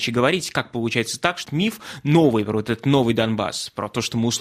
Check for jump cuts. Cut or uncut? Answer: cut